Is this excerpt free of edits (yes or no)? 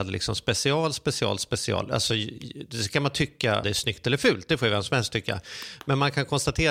no